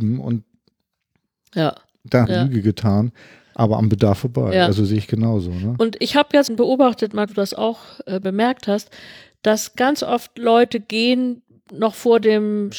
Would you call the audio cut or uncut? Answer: cut